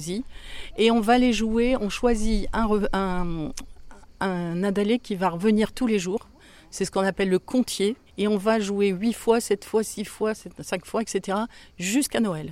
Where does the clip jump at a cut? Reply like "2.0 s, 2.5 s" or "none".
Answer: 8.1 s